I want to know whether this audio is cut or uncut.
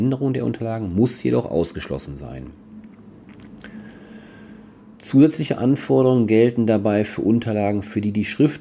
cut